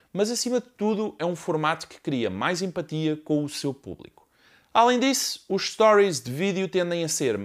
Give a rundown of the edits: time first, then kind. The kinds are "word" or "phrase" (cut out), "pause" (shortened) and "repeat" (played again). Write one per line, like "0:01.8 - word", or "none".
none